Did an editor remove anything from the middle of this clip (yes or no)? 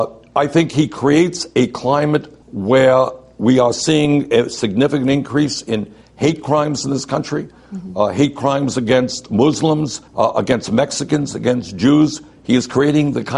yes